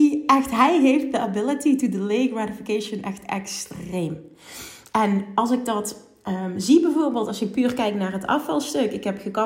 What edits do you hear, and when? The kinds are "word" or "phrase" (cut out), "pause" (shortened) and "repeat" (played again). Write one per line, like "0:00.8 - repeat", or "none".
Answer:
none